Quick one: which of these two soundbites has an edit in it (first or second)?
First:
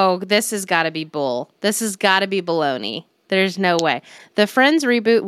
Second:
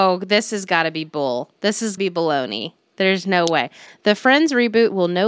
second